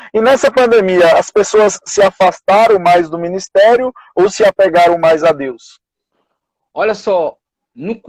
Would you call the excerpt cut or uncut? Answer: uncut